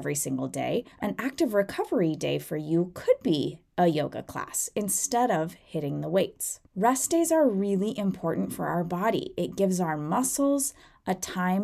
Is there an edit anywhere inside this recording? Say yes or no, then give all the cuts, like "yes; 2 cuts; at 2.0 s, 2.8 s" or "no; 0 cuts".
yes; 2 cuts; at 0.9 s, 6.7 s